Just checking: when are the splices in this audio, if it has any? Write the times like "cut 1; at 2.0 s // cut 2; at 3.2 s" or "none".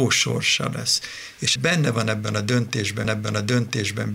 cut 1; at 1.6 s // cut 2; at 3.0 s